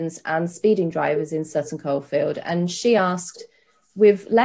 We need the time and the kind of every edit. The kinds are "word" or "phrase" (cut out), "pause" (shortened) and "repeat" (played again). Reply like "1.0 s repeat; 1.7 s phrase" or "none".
none